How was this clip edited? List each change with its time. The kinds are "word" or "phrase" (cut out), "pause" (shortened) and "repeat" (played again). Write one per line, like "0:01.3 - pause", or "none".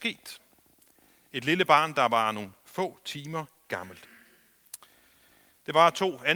none